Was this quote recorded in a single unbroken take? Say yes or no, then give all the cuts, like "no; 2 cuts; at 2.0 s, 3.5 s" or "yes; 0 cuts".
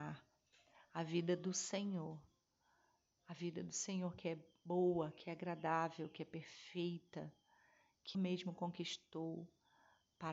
no; 1 cut; at 8.1 s